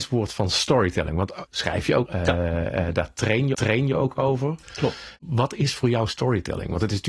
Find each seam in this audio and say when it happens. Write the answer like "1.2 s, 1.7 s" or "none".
1.5 s, 2.1 s, 3.5 s